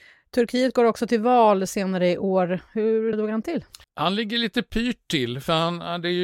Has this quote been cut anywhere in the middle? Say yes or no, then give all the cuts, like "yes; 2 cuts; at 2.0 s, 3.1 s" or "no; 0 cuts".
yes; 2 cuts; at 3.1 s, 3.8 s